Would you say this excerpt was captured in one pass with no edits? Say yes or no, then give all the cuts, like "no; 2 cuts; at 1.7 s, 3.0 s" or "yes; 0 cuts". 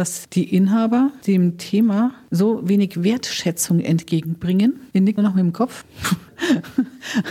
no; 1 cut; at 5.2 s